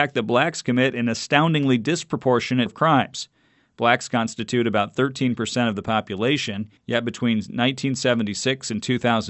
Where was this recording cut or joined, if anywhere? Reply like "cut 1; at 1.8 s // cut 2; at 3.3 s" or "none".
cut 1; at 2.7 s // cut 2; at 6.8 s